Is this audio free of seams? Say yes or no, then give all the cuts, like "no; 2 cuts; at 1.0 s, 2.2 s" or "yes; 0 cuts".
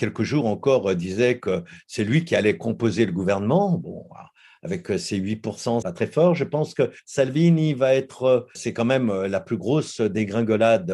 no; 3 cuts; at 5.8 s, 7.0 s, 8.6 s